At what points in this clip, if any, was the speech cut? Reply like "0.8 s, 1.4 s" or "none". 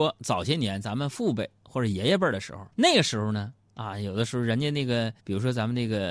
2.7 s, 5.2 s

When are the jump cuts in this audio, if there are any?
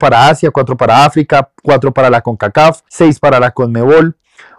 2.9 s

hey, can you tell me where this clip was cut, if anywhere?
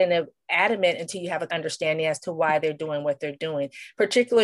1.5 s

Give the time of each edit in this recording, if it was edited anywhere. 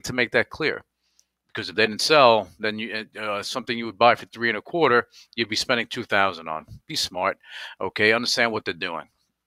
none

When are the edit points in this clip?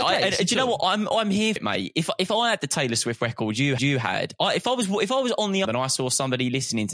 1.6 s, 3.8 s, 5.6 s

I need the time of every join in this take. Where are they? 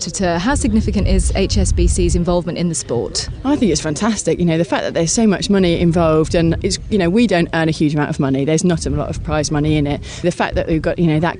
6.6 s, 10.2 s

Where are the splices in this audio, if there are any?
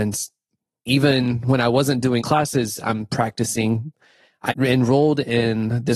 2.2 s, 4.5 s

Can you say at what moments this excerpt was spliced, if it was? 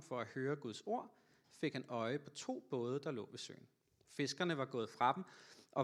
none

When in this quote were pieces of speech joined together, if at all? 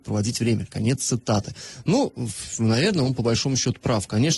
none

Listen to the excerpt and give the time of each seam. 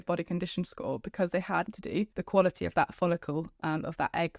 1.7 s, 2.1 s

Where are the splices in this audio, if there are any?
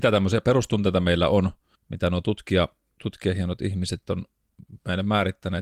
1.8 s, 2.8 s

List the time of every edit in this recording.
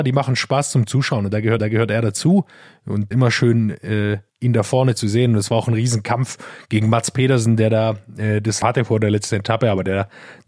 1.6 s, 3.1 s, 4.3 s, 8.6 s

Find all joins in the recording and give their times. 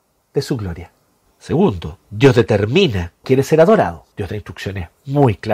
1.3 s, 3.2 s, 4.1 s

